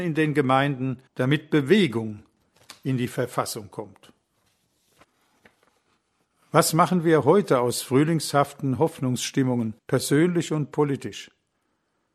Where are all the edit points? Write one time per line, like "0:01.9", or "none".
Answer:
0:01.1
0:09.8